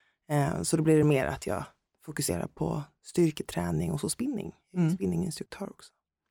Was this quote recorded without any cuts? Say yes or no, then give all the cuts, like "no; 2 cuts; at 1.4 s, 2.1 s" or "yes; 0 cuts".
yes; 0 cuts